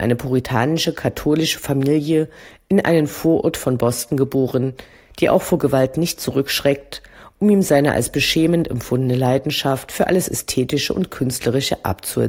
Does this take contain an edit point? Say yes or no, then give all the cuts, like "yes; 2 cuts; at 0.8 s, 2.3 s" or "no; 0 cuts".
no; 0 cuts